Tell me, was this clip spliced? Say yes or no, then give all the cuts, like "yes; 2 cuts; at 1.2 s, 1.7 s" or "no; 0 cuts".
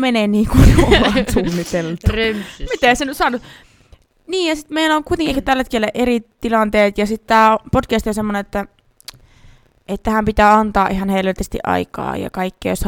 no; 0 cuts